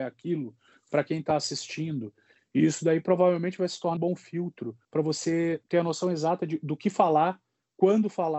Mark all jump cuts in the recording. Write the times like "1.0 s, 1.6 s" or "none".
4.0 s, 4.8 s, 5.6 s